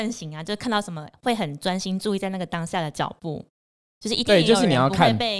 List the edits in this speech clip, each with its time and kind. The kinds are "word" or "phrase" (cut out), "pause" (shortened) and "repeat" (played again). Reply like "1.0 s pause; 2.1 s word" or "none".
none